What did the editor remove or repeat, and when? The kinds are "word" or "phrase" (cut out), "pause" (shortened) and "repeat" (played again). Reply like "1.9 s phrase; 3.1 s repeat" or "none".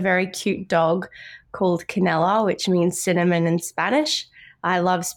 none

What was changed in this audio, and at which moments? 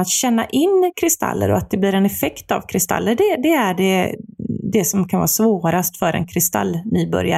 none

